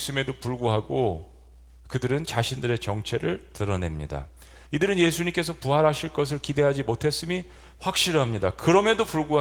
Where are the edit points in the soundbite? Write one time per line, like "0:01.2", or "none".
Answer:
none